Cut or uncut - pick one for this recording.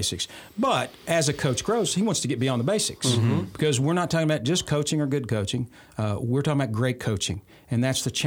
uncut